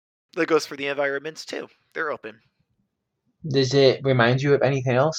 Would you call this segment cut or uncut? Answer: uncut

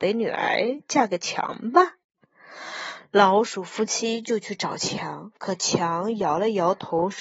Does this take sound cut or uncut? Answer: cut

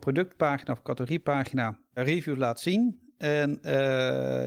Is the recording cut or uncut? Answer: uncut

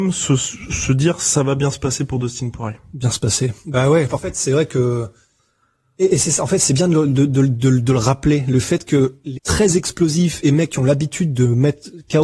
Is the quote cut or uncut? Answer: cut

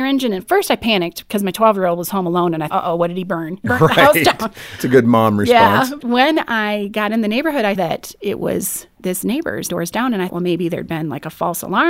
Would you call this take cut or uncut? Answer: cut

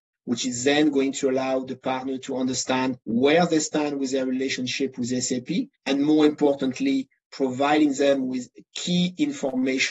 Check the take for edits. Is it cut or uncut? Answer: cut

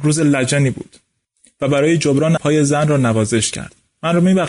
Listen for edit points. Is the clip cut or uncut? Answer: cut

